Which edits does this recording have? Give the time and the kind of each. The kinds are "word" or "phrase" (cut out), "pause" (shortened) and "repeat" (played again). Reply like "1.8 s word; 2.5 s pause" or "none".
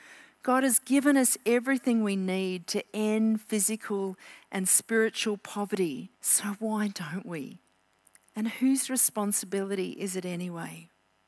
6.1 s pause; 7.9 s pause